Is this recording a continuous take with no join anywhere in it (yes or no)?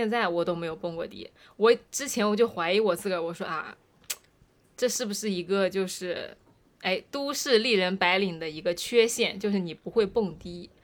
yes